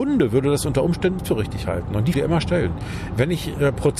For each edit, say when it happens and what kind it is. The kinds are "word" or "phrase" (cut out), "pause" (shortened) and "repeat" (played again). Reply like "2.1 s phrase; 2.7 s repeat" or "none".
1.2 s word; 2.1 s phrase